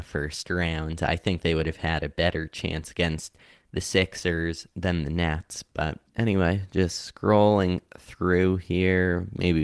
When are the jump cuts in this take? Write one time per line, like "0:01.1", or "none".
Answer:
0:06.1